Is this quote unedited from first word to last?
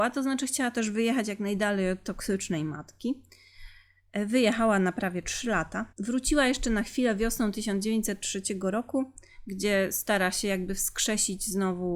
no; 1 cut; at 5.9 s

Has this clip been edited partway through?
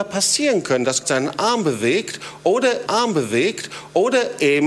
yes; 2 cuts; at 1.0 s, 2.9 s

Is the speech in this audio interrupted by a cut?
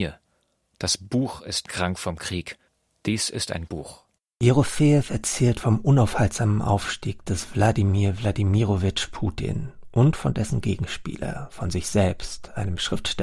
yes; 1 cut; at 3.7 s

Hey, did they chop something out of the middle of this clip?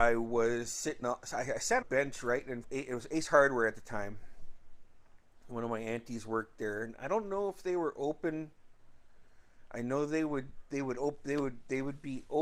yes; 3 cuts; at 1.0 s, 1.8 s, 2.6 s

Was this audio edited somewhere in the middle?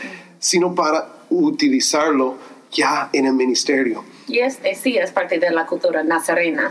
no; 0 cuts

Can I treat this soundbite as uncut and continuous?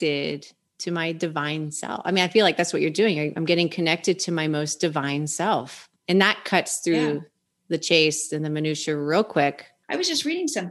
yes; 0 cuts

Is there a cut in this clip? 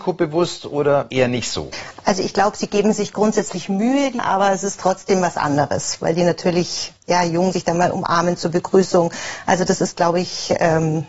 yes; 2 cuts; at 4.2 s, 7.5 s

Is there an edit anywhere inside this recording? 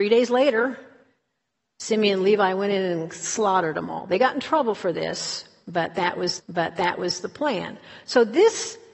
yes; 1 cut; at 6.4 s

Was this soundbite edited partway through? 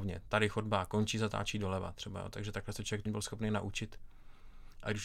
yes; 1 cut; at 3.1 s

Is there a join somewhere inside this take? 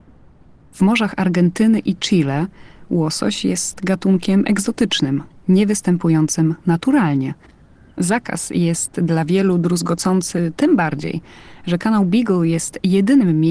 no; 0 cuts

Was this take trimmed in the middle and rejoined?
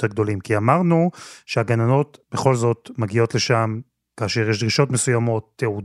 no; 0 cuts

